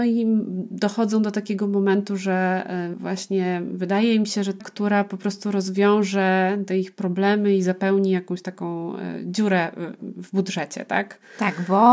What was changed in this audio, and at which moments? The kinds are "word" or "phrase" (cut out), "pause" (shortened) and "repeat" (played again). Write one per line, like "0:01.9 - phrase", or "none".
0:04.6 - phrase

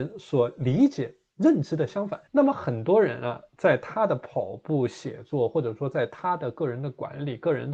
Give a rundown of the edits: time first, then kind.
0:02.3 - pause

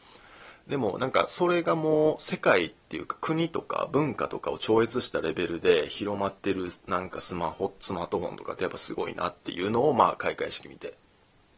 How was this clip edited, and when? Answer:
0:06.4 - pause

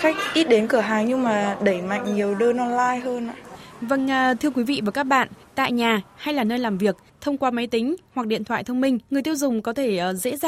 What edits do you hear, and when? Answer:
0:09.0 - pause

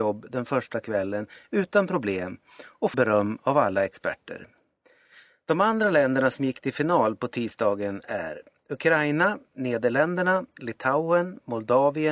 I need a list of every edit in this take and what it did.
0:02.9 - word

